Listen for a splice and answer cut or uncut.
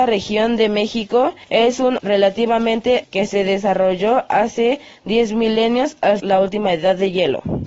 cut